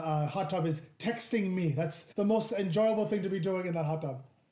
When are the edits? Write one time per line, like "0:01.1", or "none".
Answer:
0:02.1